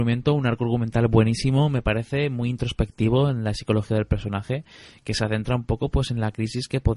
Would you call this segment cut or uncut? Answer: uncut